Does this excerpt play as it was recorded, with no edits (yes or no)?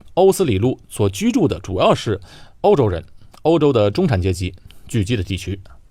no